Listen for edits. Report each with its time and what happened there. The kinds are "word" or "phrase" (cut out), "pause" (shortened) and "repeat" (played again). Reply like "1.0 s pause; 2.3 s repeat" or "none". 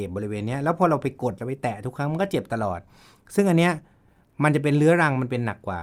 none

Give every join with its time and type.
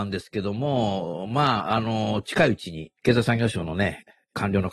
3.0 s pause

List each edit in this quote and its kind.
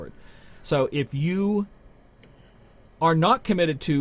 none

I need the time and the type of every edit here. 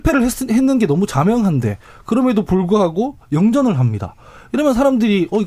none

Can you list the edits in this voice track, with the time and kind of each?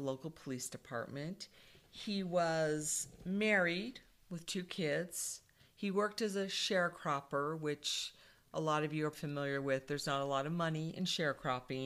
9.1 s word

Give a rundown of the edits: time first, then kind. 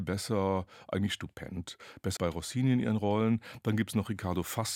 2.2 s word

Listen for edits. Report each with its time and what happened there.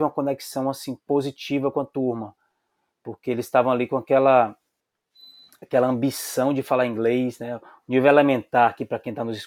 none

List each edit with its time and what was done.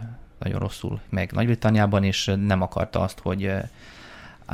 1.1 s word

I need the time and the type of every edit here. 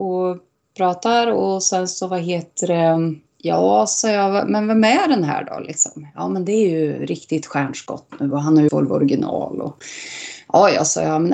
3.3 s pause; 8.7 s word

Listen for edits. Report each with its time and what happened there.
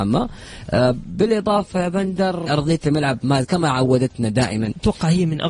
2.5 s word; 3.4 s word

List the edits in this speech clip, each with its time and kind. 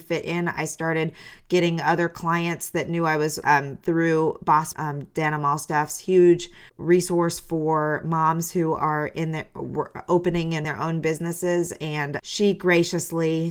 3.4 s phrase; 4.7 s word; 6.7 s pause; 10.6 s word; 12.2 s word

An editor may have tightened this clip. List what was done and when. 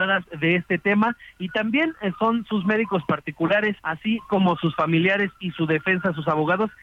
3.8 s pause

